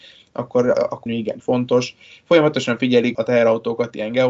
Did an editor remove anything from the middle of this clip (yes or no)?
yes